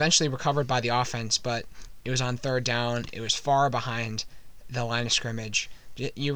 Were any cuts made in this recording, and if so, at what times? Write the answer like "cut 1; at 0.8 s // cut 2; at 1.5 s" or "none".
cut 1; at 3.1 s